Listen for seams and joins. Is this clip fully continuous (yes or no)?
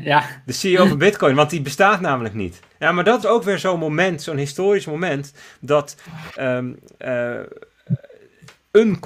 no